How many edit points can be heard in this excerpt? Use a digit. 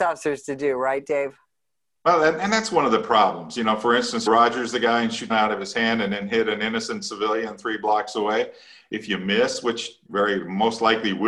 3